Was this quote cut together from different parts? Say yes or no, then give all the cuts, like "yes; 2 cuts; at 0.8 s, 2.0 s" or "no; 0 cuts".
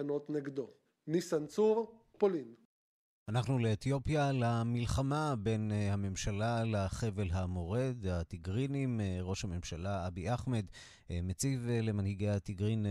no; 0 cuts